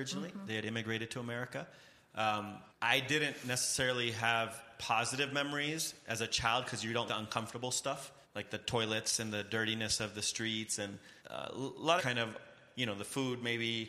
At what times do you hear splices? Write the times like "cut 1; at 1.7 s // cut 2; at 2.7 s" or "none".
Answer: cut 1; at 2.7 s // cut 2; at 7.1 s // cut 3; at 8.2 s // cut 4; at 11.2 s // cut 5; at 12.0 s

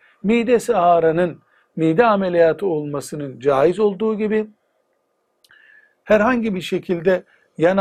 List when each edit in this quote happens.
none

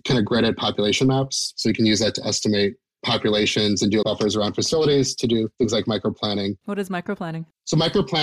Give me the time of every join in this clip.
cut 1; at 4.0 s

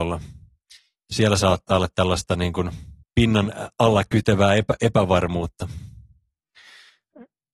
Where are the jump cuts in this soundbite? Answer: cut 1; at 3.0 s

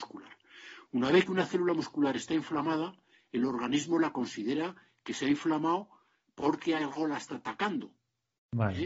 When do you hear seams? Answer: none

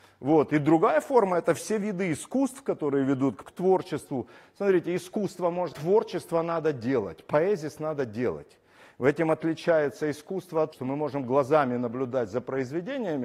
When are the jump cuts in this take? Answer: cut 1; at 3.4 s // cut 2; at 5.7 s // cut 3; at 10.7 s

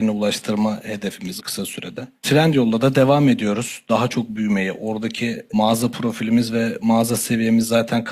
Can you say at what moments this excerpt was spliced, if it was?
cut 1; at 1.4 s

